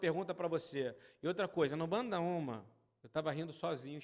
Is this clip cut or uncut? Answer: uncut